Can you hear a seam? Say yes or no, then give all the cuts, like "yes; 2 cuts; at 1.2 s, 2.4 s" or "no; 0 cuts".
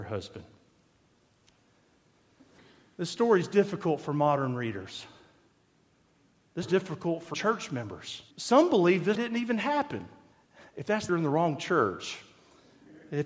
yes; 6 cuts; at 6.6 s, 7.3 s, 8.3 s, 9.2 s, 10.3 s, 11.1 s